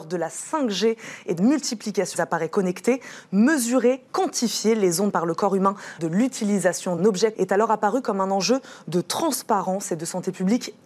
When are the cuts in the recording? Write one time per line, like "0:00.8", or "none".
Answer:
0:01.4
0:02.1
0:04.1
0:05.1
0:06.0
0:07.0
0:07.3